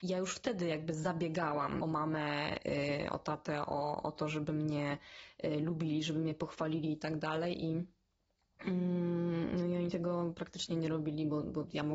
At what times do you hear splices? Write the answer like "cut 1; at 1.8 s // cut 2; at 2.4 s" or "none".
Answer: cut 1; at 1.8 s